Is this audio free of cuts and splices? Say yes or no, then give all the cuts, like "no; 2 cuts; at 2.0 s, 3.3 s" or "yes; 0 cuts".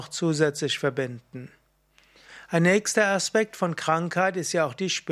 yes; 0 cuts